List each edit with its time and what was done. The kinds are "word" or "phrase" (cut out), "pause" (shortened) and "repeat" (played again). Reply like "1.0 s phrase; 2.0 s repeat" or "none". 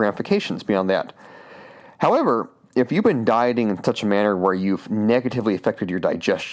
none

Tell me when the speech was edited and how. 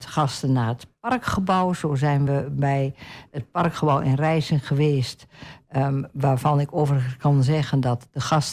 none

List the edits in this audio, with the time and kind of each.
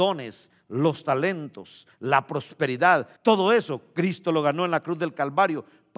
3.2 s pause

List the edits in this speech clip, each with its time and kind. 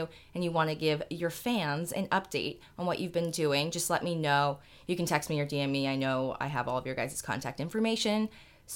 none

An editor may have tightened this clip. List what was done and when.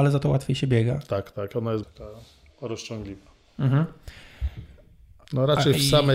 1.3 s word; 1.8 s word

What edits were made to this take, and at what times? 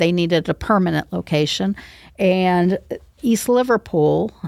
none

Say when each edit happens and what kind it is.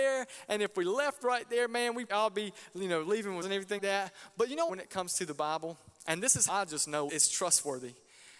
2.1 s word; 3.4 s word; 3.8 s word; 4.7 s phrase; 6.5 s word; 7.1 s word

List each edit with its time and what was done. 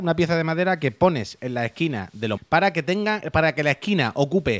2.4 s word

